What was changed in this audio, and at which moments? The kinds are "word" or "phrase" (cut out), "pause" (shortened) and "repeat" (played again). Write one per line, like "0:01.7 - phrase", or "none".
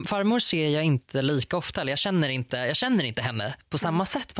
none